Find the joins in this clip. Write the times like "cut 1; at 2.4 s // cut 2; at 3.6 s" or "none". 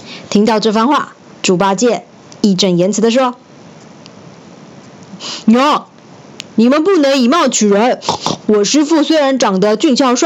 cut 1; at 1.3 s // cut 2; at 6.5 s